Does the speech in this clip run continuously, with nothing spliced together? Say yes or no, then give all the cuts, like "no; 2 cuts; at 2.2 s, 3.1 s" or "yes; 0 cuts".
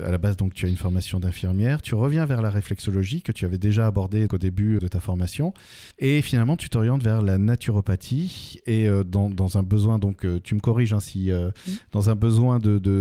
no; 3 cuts; at 4.3 s, 4.8 s, 5.9 s